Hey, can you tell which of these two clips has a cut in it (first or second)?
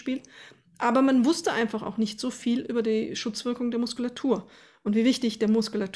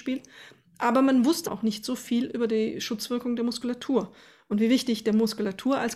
second